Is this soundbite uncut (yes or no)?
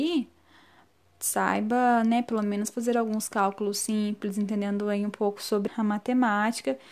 no